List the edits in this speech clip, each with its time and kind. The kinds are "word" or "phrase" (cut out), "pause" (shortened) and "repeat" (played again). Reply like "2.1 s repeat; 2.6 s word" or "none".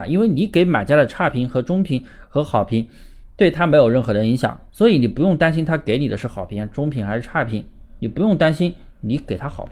4.7 s pause